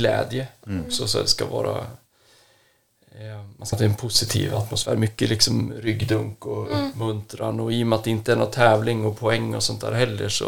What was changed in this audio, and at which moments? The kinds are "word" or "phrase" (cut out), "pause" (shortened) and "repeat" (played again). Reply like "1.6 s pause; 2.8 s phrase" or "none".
3.7 s word